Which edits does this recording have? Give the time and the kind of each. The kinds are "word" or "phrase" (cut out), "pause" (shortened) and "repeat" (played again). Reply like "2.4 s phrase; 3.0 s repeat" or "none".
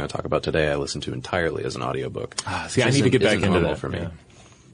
none